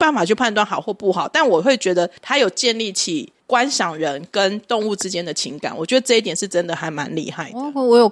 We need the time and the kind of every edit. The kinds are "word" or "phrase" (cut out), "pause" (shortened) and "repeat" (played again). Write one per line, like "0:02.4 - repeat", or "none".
0:02.2 - pause
0:03.4 - pause